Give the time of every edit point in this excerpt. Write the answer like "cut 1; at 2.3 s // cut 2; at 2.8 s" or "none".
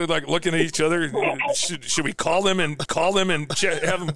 cut 1; at 2.8 s